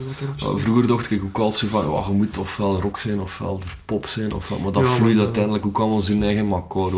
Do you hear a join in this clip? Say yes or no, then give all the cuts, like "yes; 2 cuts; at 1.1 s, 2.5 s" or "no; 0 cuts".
no; 0 cuts